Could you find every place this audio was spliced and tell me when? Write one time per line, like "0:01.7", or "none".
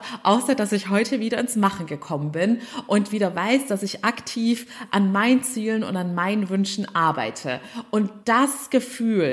0:08.2